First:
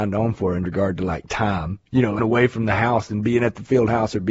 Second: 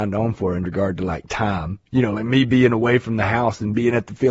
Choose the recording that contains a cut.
first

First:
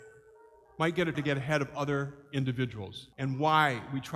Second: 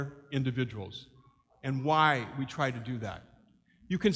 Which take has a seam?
first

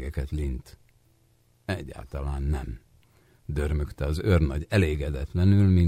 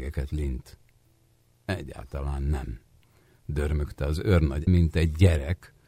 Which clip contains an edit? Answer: second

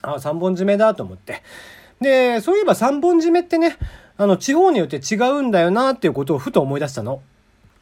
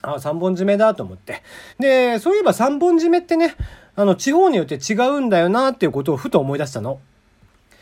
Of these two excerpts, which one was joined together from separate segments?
second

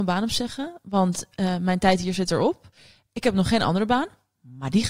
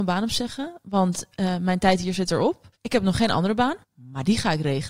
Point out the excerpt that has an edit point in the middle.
second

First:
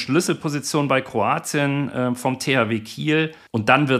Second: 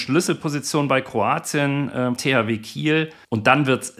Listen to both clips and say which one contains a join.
second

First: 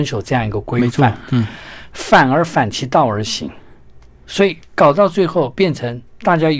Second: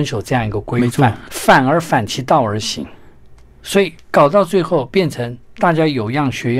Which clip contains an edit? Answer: second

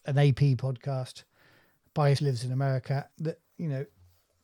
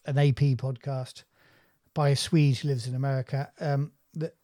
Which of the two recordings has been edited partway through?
first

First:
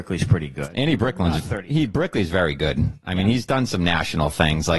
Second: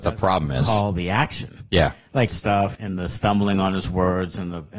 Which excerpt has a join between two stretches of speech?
second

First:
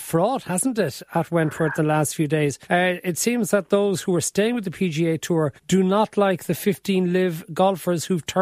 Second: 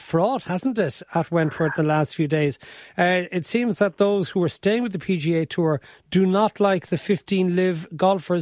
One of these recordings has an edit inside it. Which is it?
first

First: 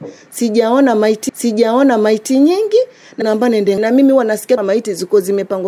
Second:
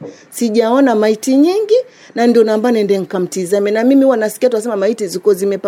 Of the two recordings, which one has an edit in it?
first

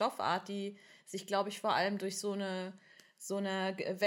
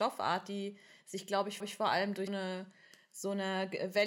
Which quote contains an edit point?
second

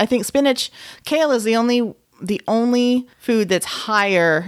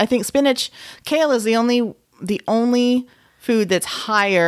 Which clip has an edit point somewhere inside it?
first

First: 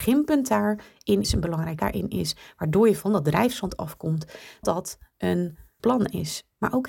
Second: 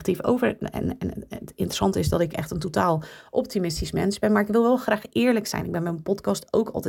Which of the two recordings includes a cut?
first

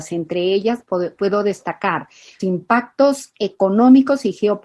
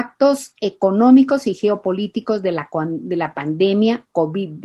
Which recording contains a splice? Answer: first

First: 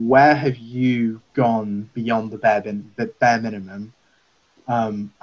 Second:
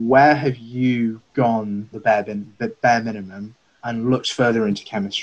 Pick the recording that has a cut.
second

